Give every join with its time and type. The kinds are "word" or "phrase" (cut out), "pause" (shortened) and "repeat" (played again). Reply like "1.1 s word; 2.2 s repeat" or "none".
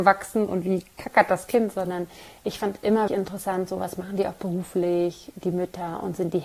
3.1 s word